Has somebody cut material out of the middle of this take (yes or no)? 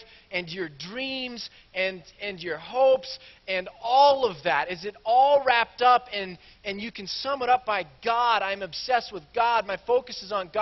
no